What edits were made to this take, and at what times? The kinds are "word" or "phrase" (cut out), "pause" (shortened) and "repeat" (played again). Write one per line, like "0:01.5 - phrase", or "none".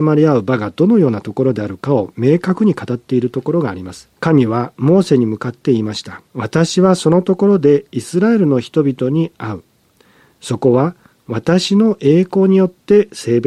0:04.2 - pause
0:06.3 - pause